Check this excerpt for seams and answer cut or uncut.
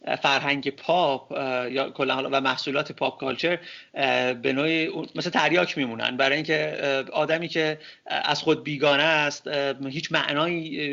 uncut